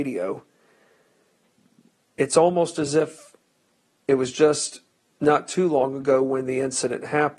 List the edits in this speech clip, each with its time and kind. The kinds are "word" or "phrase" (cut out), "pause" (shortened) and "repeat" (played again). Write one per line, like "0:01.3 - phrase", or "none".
none

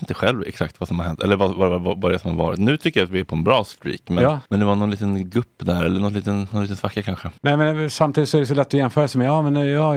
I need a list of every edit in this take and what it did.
0:04.5 - pause
0:07.4 - pause

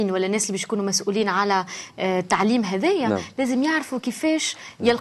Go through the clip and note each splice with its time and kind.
none

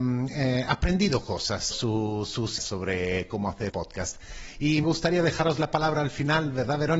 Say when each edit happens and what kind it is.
0:01.7 - word
0:02.6 - word
0:03.7 - word
0:04.8 - word

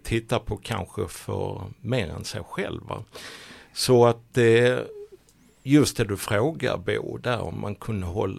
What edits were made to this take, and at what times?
none

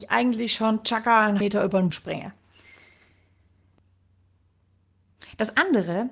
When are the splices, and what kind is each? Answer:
0:01.4 - word
0:01.9 - word

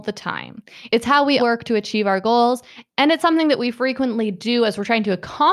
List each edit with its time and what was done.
0:01.4 - word

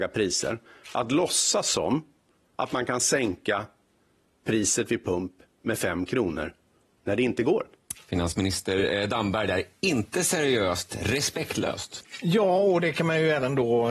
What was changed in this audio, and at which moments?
none

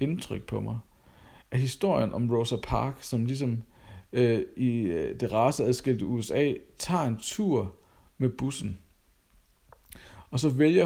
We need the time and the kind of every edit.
none

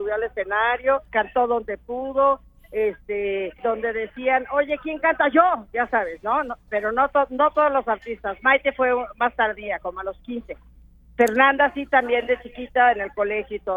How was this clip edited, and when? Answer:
0:01.1 - pause
0:03.5 - pause

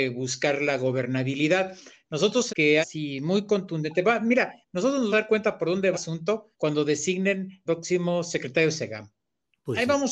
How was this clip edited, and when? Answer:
0:02.5 - word
0:02.8 - phrase
0:04.6 - pause
0:05.1 - word
0:05.9 - word
0:06.5 - pause
0:07.7 - word

